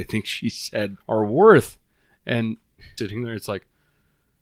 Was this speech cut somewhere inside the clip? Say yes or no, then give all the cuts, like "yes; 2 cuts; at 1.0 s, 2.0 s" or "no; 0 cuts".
yes; 2 cuts; at 1.0 s, 3.0 s